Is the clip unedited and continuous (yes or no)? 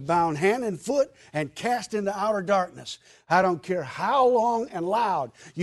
yes